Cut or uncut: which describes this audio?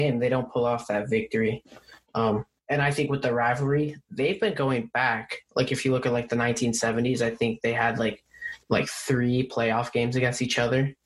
cut